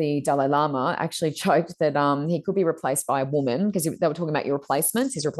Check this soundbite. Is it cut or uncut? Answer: uncut